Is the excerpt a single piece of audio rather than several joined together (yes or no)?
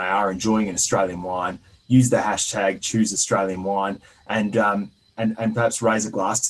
yes